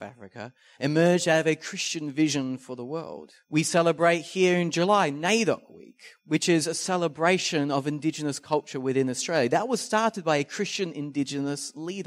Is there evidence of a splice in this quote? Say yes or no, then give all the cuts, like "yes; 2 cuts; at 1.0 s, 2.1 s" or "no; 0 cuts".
yes; 2 cuts; at 3.4 s, 6.2 s